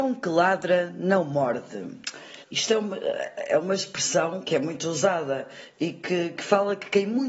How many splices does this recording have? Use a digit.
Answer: 2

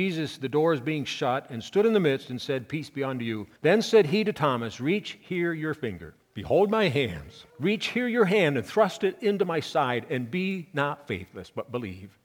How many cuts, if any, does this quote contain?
3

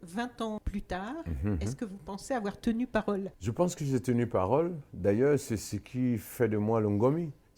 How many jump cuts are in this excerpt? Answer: 0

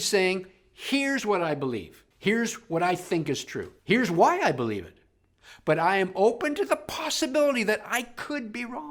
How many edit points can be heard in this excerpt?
2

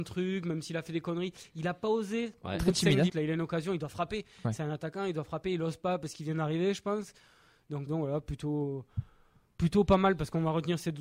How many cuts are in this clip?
2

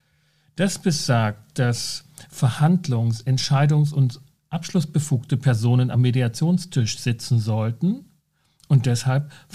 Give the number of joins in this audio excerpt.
0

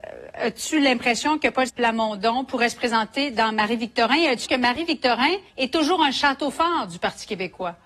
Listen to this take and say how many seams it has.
3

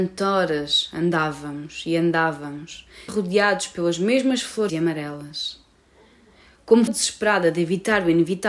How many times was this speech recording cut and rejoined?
3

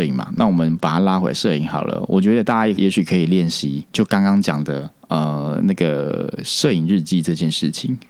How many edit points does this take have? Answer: 0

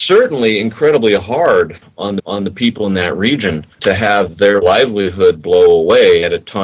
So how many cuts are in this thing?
2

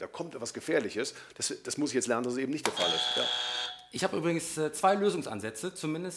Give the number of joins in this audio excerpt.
0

